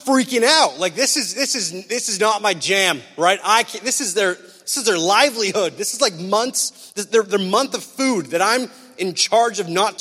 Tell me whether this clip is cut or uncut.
uncut